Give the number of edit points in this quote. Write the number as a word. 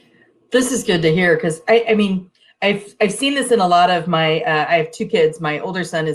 zero